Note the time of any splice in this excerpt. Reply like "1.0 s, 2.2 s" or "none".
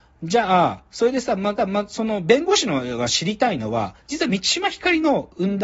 1.6 s